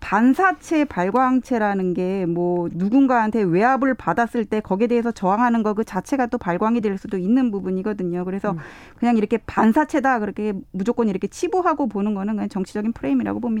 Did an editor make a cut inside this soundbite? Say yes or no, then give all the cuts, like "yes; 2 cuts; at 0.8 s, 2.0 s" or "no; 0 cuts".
no; 0 cuts